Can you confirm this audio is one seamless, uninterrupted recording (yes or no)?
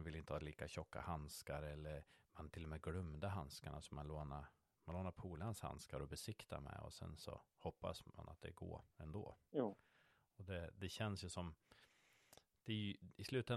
yes